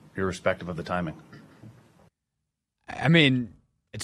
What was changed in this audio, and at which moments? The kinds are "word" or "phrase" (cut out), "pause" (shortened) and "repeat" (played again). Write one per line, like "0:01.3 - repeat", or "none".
none